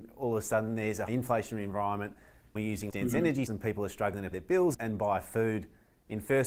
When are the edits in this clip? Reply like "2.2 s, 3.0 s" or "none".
1.1 s, 2.6 s, 2.9 s, 3.5 s, 4.3 s, 4.7 s